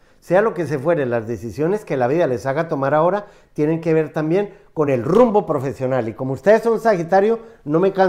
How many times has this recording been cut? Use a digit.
0